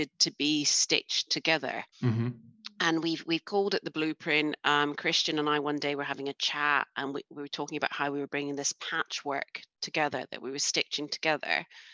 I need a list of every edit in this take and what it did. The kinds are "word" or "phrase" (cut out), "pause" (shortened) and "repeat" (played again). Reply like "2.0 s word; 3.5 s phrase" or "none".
1.9 s pause

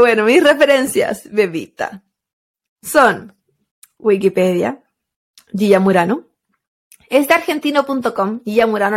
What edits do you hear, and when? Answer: none

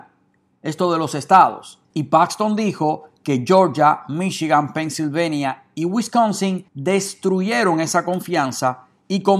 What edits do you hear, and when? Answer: 1.8 s pause; 6.7 s pause

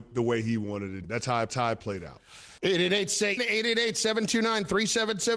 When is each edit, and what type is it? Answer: 1.0 s word; 1.5 s repeat; 2.6 s pause; 3.4 s word

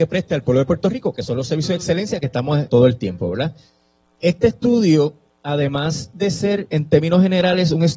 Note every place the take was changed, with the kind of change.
2.7 s word

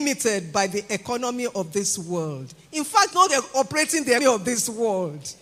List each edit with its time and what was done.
3.1 s word; 4.2 s word

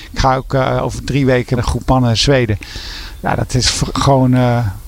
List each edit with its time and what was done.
1.6 s word; 3.6 s phrase

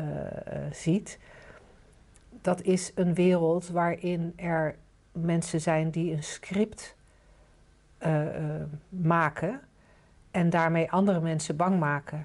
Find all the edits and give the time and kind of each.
none

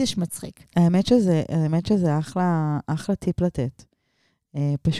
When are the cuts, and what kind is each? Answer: none

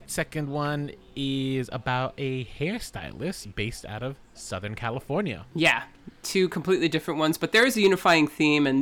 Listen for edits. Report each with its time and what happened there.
none

